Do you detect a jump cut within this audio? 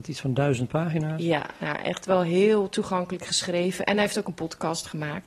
no; 0 cuts

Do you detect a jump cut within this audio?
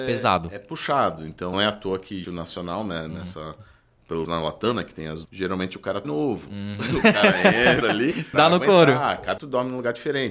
yes; 8 cuts; at 1.5 s, 2.2 s, 4.3 s, 5.3 s, 6.0 s, 7.8 s, 8.3 s, 9.4 s

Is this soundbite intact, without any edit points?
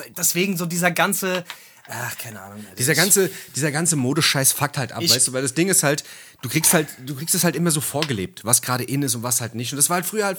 yes; 0 cuts

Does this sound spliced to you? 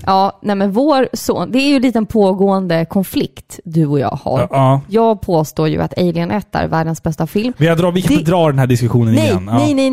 no; 0 cuts

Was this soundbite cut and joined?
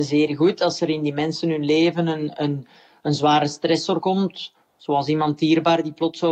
no; 0 cuts

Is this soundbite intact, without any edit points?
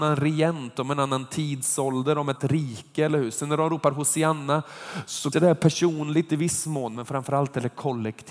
no; 2 cuts; at 2.4 s, 5.3 s

